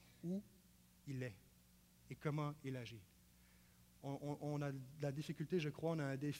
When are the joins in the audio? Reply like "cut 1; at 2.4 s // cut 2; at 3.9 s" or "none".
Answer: none